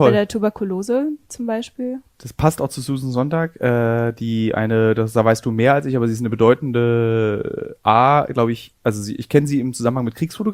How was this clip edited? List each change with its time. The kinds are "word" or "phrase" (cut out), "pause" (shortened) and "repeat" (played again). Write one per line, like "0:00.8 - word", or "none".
none

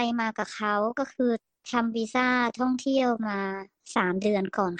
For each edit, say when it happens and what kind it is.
none

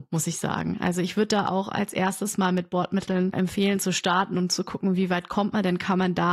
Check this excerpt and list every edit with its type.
0:03.3 - word

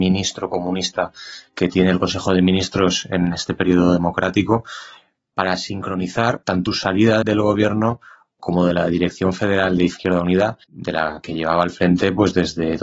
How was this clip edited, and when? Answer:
0:01.5 - pause
0:06.7 - word
0:07.2 - word
0:10.6 - pause

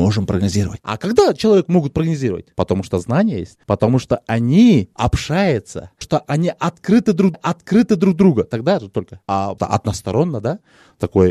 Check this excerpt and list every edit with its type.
0:03.6 - pause
0:06.0 - word
0:07.3 - repeat
0:09.6 - word

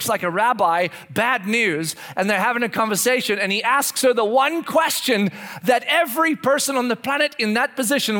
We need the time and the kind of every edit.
none

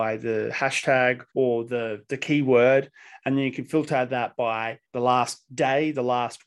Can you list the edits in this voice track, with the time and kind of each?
0:01.3 - pause
0:04.8 - pause

